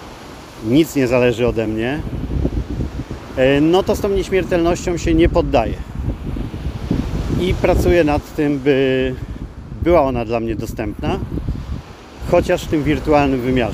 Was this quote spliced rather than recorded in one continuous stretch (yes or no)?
no